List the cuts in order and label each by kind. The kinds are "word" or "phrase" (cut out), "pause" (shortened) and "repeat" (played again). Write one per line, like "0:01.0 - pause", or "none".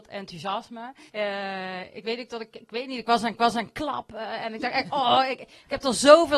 0:01.1 - pause
0:02.5 - word
0:03.3 - repeat

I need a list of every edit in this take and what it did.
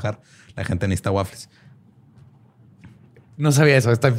none

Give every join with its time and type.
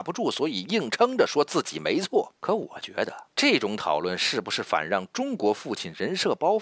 0:02.4 - pause
0:03.3 - pause

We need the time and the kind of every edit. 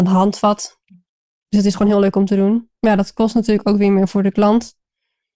0:02.8 - pause

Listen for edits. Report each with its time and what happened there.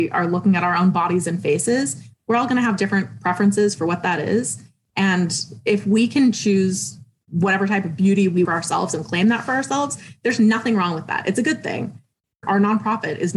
0:08.4 - word

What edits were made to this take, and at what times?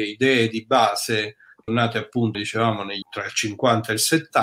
0:01.7 - word
0:02.3 - word
0:03.0 - word

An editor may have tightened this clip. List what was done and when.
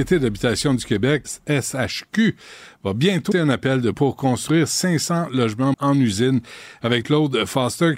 0:01.2 - word
0:03.3 - word
0:03.9 - word
0:05.7 - word
0:07.0 - word

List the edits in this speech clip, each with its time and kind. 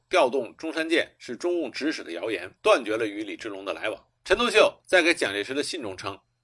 0:02.6 - pause
0:04.1 - pause

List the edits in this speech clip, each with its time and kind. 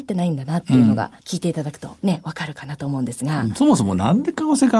0:01.2 - pause
0:02.0 - pause

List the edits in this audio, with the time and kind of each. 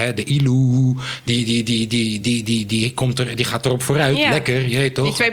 none

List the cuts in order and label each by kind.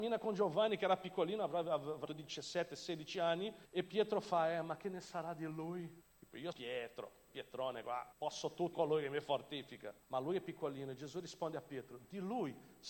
0:02.1 - word
0:03.7 - pause
0:06.0 - pause
0:06.5 - word
0:07.3 - word
0:08.1 - pause
0:08.7 - word
0:10.0 - pause

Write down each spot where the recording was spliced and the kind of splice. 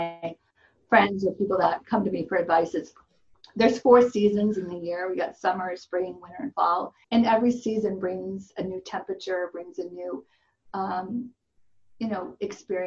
0:07.0 - pause

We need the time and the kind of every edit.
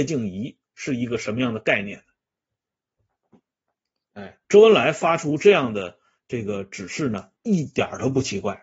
0:04.4 - pause
0:07.4 - pause

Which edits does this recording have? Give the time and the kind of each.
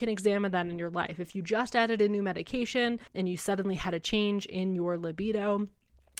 0:03.1 - pause

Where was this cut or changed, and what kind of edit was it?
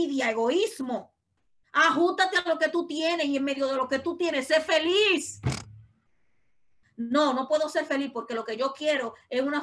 none

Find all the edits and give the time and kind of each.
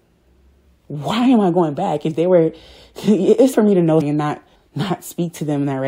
0:03.5 - word
0:04.0 - word
0:04.6 - pause

